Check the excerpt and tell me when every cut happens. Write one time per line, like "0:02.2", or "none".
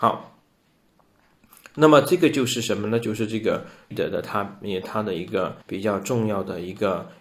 0:03.9
0:05.6